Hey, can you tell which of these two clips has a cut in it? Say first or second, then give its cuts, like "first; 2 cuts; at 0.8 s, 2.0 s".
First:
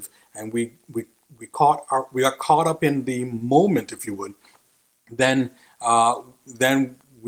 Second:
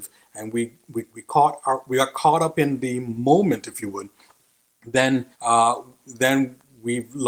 second; 2 cuts; at 1.1 s, 5.3 s